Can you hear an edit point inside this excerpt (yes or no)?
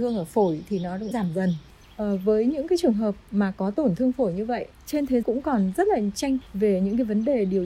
yes